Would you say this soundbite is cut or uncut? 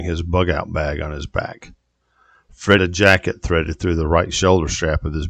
cut